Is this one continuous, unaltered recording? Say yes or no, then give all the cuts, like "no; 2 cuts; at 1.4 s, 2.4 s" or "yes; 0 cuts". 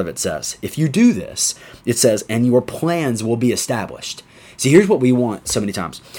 yes; 0 cuts